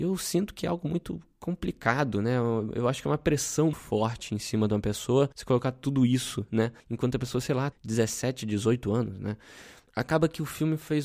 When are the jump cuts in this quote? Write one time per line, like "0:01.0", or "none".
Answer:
0:03.7
0:05.3
0:06.8
0:07.7